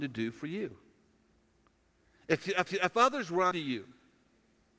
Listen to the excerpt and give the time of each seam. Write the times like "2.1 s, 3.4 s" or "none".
2.7 s, 3.5 s